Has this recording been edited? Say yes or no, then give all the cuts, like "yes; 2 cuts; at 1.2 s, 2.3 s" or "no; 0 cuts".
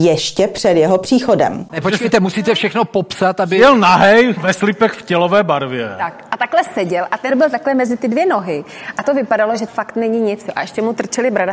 yes; 4 cuts; at 4.4 s, 7.3 s, 9.0 s, 9.7 s